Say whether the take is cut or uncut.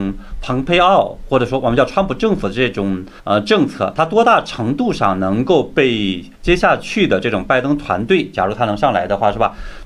cut